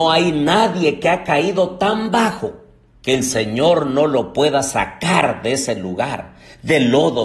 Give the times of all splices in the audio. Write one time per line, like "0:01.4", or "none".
none